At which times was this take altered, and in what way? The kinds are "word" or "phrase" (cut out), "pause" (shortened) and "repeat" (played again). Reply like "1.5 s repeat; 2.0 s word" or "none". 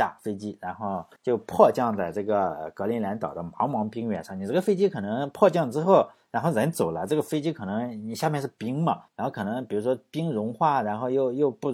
1.2 s pause; 9.1 s pause